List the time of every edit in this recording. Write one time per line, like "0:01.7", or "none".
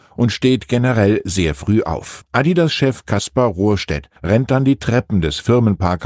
0:02.3
0:04.2